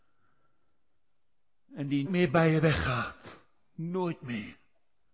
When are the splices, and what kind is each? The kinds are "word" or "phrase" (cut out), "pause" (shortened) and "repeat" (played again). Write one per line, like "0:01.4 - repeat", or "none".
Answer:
0:02.1 - word